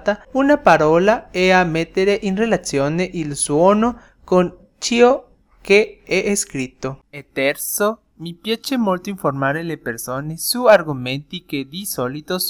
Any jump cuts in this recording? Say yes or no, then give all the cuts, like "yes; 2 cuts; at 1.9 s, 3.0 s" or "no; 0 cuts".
no; 0 cuts